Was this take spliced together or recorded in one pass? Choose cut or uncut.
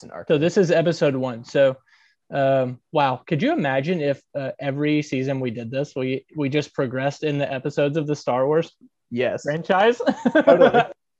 uncut